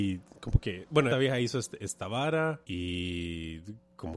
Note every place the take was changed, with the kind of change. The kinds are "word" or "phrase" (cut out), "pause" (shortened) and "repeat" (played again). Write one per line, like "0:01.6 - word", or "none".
0:01.1 - word
0:02.6 - pause